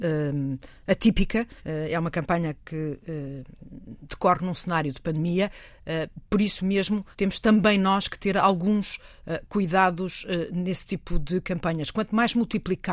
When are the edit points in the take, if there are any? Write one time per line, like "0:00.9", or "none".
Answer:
0:01.6
0:07.1

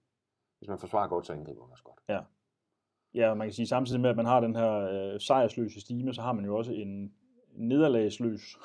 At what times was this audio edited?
none

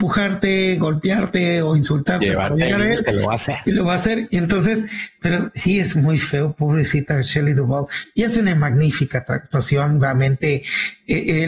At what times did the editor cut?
none

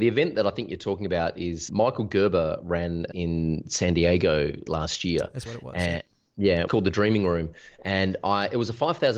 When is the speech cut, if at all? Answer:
0:01.7
0:03.1
0:04.7
0:05.5
0:06.7

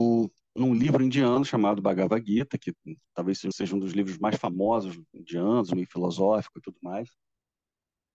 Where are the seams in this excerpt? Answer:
0:03.0
0:03.5
0:05.7

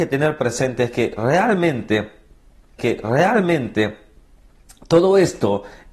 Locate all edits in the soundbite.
0:02.8

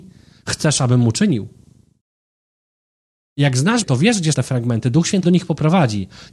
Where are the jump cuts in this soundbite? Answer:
0:03.8
0:04.3
0:05.2

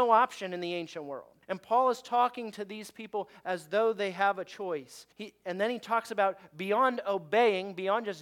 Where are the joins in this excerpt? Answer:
0:01.4
0:05.1

